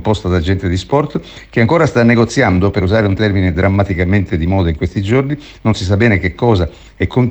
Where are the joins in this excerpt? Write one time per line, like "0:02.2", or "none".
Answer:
none